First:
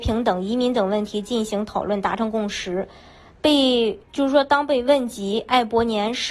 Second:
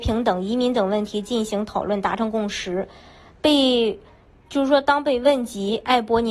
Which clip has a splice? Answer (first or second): first